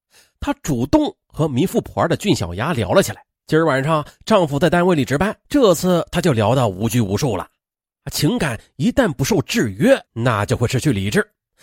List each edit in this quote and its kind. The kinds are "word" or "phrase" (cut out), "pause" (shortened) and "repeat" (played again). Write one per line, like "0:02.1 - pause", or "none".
0:03.3 - pause
0:05.4 - pause
0:10.1 - pause